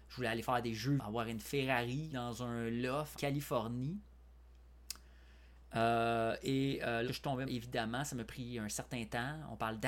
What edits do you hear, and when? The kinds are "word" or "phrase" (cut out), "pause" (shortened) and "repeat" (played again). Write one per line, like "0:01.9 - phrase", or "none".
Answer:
0:01.0 - word
0:02.1 - word
0:03.1 - word
0:07.1 - word
0:07.5 - word
0:08.3 - word